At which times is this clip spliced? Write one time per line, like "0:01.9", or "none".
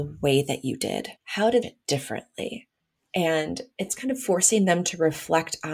0:01.2
0:01.6
0:02.8

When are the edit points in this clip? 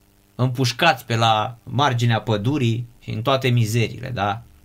0:01.6
0:03.0

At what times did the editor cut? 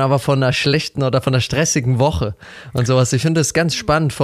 none

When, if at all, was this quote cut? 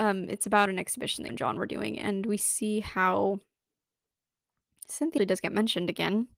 0:01.3
0:05.2

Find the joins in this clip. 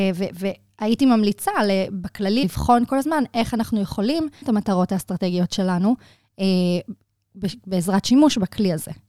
0:02.4
0:04.4

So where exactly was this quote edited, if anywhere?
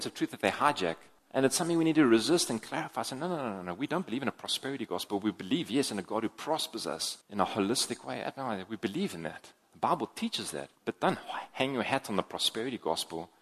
0:01.2
0:07.2
0:10.7

